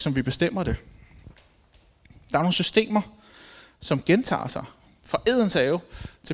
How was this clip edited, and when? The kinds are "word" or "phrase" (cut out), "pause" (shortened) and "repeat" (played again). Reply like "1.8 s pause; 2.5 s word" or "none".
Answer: none